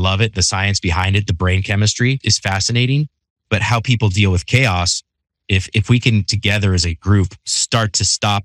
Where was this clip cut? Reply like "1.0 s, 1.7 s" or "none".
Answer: none